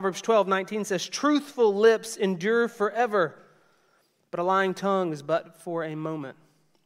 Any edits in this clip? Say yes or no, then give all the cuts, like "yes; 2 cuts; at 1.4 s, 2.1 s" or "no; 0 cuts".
no; 0 cuts